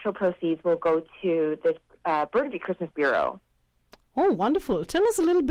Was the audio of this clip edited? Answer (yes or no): no